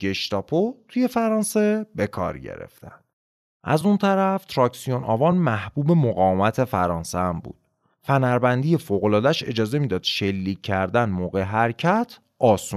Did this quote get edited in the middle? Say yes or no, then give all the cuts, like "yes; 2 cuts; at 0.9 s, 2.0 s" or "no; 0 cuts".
no; 0 cuts